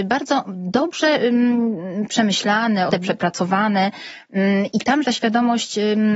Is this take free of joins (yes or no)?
no